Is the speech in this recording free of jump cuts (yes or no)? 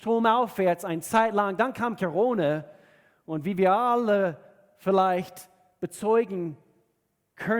yes